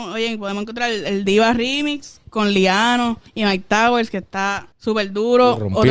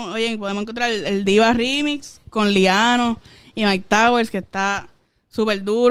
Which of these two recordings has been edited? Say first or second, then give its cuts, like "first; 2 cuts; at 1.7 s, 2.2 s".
first; 2 cuts; at 3.3 s, 4.7 s